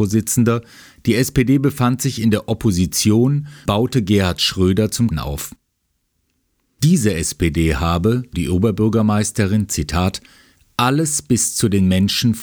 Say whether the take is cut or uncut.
cut